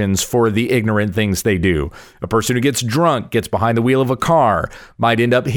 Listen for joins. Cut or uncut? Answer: uncut